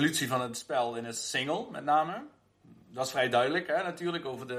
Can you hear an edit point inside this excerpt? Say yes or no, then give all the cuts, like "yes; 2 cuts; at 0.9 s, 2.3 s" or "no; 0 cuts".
no; 0 cuts